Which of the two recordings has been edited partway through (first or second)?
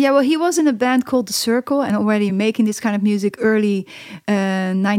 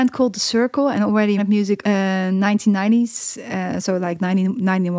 second